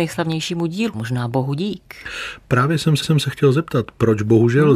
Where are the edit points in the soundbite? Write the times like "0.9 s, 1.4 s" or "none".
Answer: 0.9 s, 3.0 s